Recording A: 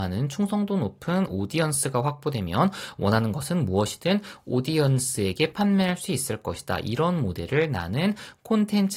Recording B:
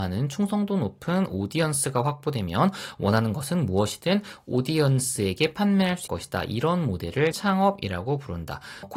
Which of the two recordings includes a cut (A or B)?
B